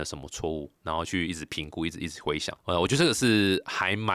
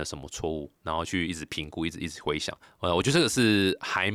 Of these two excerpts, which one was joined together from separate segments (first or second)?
first